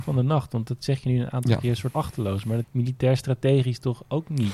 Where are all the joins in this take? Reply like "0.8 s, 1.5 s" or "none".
1.9 s, 2.6 s